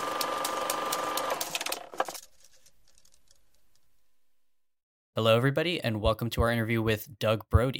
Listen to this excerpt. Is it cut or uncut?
uncut